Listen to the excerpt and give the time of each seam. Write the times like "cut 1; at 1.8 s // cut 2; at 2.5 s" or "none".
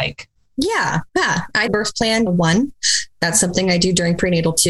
cut 1; at 1.1 s // cut 2; at 1.7 s // cut 3; at 2.3 s